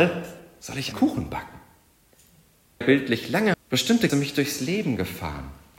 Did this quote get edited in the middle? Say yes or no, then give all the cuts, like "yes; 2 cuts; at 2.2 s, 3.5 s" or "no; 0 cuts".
yes; 4 cuts; at 0.9 s, 2.8 s, 3.5 s, 4.1 s